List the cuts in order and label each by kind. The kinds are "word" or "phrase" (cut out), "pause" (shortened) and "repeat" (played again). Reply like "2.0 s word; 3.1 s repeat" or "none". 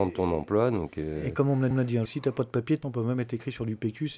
1.7 s repeat; 2.1 s word; 2.8 s word